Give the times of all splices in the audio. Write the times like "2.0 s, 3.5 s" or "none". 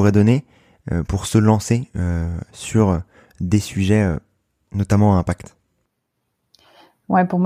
none